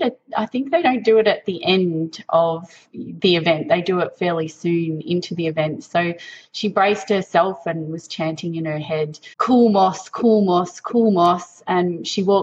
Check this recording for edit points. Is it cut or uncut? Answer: cut